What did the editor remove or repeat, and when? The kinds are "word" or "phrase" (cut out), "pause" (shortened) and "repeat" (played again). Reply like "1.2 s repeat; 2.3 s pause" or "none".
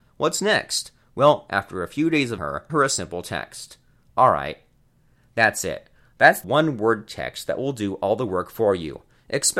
2.4 s word; 2.7 s word; 6.4 s word